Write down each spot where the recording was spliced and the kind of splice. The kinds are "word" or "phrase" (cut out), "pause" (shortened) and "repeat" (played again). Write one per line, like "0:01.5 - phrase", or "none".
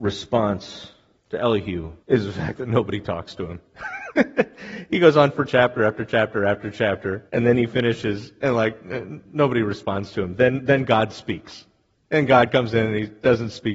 0:01.1 - pause
0:02.0 - pause
0:07.3 - pause
0:11.9 - pause